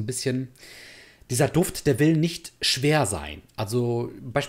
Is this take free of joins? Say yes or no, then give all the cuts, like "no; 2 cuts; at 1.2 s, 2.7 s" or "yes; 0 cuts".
yes; 0 cuts